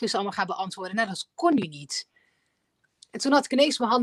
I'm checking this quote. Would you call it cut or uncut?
uncut